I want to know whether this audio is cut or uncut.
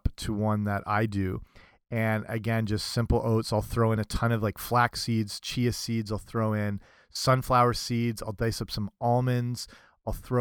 uncut